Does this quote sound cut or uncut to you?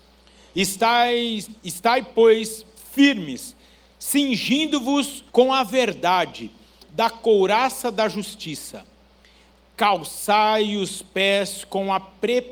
cut